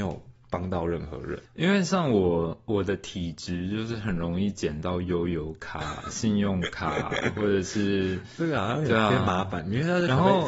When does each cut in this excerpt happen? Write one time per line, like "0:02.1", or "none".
0:01.5

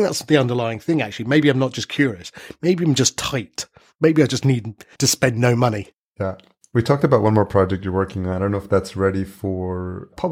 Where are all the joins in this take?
0:04.9

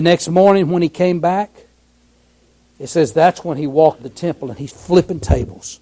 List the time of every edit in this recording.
0:04.0
0:04.7

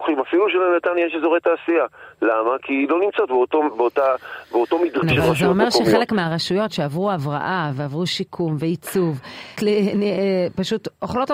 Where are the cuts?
0:05.0
0:09.6

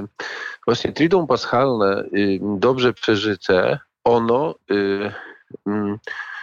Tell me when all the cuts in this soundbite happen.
none

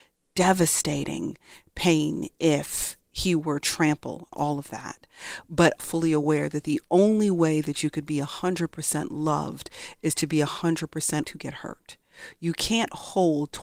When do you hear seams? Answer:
0:03.6
0:04.3
0:05.8
0:11.2

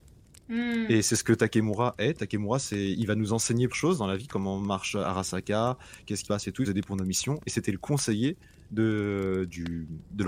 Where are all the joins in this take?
0:03.7
0:06.3
0:06.7

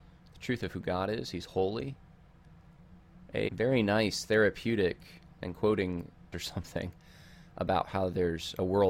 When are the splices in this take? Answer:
0:03.5
0:05.4
0:06.3

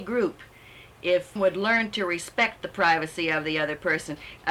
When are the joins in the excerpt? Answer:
0:01.4

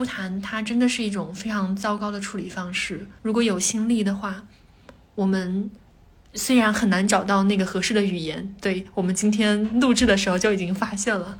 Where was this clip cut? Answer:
0:03.2
0:05.9

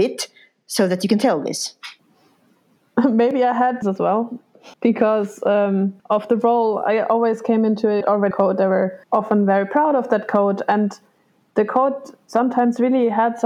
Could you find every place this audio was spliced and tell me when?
0:02.0
0:03.8
0:04.7
0:06.0
0:08.0
0:08.3
0:09.0

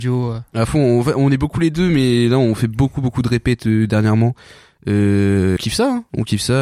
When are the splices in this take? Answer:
0:05.6

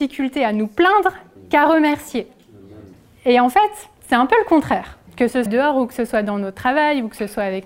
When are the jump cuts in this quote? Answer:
0:01.4
0:02.9
0:04.0
0:05.1
0:05.5

